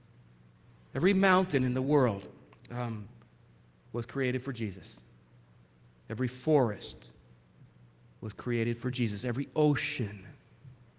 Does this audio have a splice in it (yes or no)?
no